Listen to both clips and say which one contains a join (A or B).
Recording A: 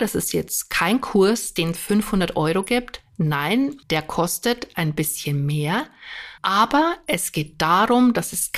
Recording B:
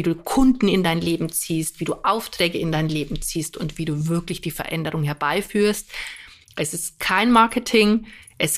A